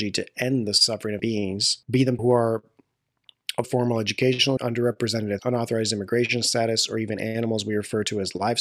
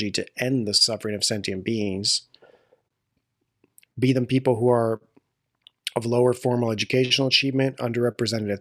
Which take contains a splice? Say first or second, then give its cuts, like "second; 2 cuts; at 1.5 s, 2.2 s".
first; 6 cuts; at 1.2 s, 1.8 s, 2.2 s, 3.6 s, 4.6 s, 5.4 s